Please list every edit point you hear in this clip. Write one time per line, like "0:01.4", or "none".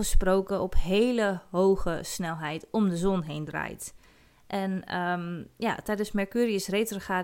none